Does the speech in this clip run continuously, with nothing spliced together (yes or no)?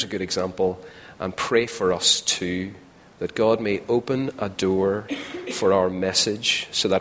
yes